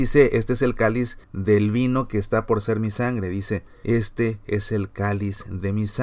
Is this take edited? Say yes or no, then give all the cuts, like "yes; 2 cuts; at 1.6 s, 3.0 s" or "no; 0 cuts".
yes; 1 cut; at 1.2 s